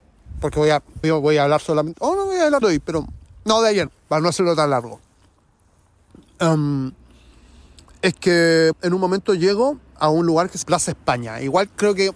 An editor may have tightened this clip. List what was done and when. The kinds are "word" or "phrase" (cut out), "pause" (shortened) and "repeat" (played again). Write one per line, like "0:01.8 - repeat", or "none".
0:01.0 - word
0:02.6 - word
0:03.9 - word
0:08.7 - word
0:10.6 - word